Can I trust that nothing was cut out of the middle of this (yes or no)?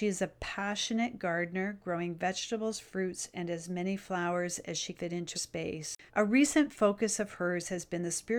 no